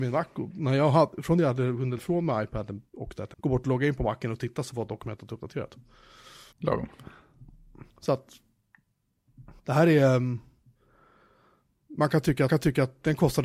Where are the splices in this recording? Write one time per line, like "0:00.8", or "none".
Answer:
0:02.0
0:02.9
0:03.3
0:06.5
0:07.9
0:09.6
0:12.5